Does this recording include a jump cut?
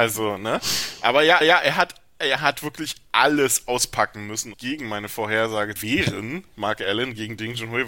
yes; 3 cuts; at 1.4 s, 4.5 s, 5.8 s

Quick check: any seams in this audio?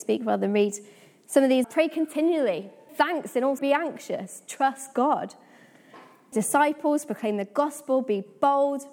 yes; 4 cuts; at 1.6 s, 2.9 s, 3.6 s, 6.3 s

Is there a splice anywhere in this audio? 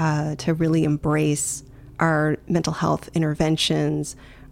no; 0 cuts

